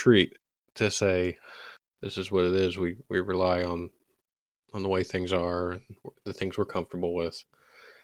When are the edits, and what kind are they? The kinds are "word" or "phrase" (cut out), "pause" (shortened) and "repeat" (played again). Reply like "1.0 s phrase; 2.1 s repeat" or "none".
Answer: none